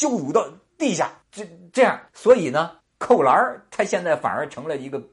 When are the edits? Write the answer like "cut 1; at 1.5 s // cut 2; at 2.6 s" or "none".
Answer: cut 1; at 1.2 s // cut 2; at 2.1 s // cut 3; at 2.8 s